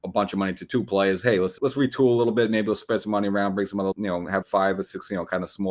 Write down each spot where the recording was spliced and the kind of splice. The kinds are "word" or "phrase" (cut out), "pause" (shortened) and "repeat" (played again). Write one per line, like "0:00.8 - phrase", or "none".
0:01.6 - word
0:03.9 - word
0:04.4 - word